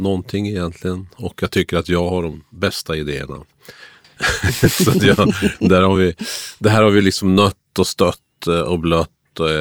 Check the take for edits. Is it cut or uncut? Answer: uncut